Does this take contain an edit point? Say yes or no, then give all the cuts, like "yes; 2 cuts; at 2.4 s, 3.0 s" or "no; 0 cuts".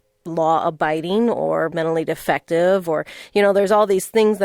yes; 1 cut; at 1.7 s